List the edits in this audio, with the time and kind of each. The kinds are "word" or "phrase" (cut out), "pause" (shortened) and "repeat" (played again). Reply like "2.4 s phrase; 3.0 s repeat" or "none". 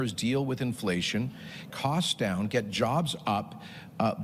1.7 s word

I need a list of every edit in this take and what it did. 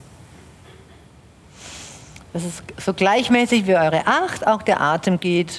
none

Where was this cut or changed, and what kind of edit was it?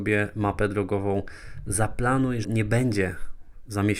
2.4 s phrase

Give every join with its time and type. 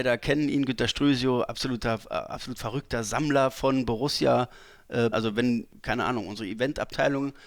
5.1 s word

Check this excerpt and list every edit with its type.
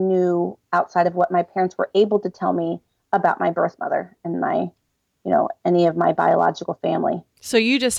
none

